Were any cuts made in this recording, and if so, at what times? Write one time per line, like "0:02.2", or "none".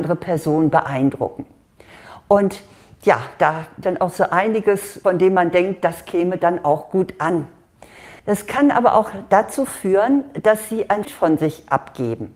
0:03.8
0:08.2
0:11.0

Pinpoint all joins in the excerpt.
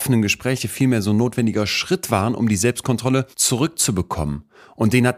0:03.3

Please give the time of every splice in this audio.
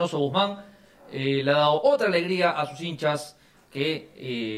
none

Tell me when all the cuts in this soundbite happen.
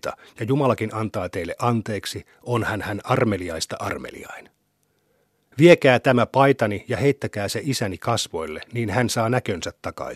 none

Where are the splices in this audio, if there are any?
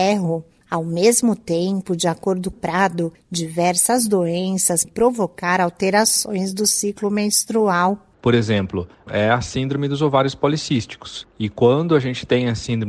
0:02.5
0:04.8
0:09.1

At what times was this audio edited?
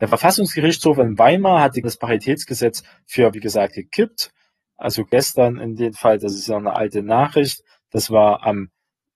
0:01.8
0:03.3

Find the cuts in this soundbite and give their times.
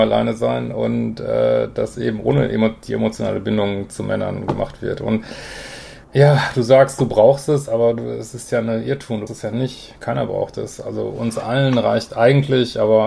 0:01.9
0:06.0
0:09.3

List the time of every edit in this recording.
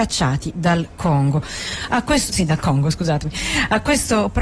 0:02.3

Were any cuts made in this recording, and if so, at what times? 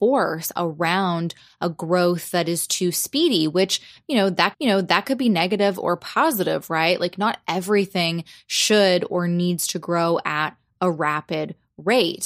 0:04.5

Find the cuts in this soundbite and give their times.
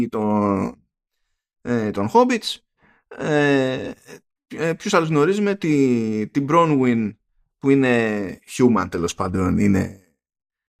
none

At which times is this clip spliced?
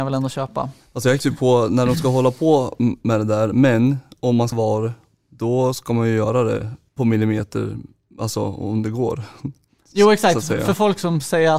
0:01.2
0:04.5
0:06.9

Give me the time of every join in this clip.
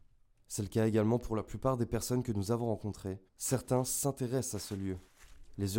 0:03.3

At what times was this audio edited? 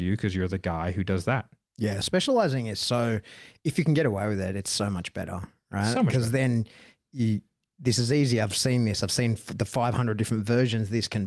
none

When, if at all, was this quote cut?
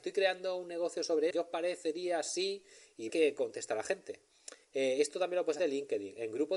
0:01.3
0:03.1
0:04.6
0:05.6

